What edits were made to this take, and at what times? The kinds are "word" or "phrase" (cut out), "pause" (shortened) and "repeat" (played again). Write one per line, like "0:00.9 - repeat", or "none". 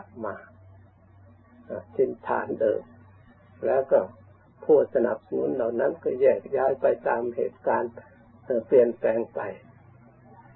none